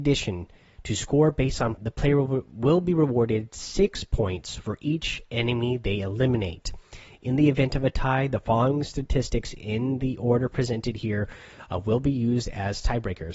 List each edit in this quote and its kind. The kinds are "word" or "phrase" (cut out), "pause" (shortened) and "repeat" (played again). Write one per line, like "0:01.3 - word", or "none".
0:01.8 - word